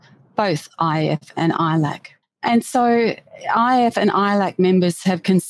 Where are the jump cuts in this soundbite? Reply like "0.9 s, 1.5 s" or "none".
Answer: 2.2 s